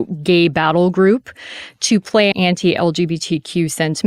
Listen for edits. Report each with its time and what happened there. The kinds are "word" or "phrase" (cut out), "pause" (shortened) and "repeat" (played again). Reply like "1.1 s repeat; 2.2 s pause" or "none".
2.3 s word